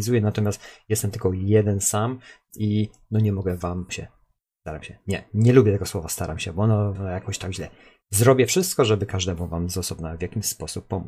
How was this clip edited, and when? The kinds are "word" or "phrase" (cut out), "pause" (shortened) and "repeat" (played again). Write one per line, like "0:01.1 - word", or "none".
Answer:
0:03.9 - phrase
0:06.9 - word